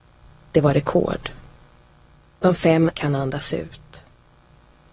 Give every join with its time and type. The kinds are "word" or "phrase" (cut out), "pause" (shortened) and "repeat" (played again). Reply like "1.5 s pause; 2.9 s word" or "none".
2.9 s word